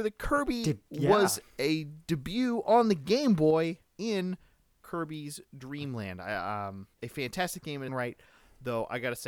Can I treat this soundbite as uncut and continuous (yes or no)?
no